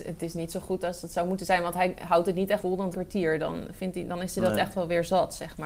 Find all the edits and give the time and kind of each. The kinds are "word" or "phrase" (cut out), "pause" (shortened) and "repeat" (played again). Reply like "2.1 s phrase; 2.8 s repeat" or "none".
2.6 s word; 2.9 s word